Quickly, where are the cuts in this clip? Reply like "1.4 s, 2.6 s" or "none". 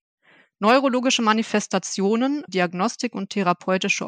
2.5 s